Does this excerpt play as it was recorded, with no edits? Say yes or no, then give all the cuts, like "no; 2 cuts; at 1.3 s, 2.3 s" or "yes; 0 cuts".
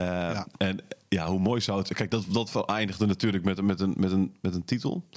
yes; 0 cuts